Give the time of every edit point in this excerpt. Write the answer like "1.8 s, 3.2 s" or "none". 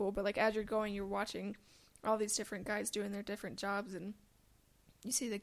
none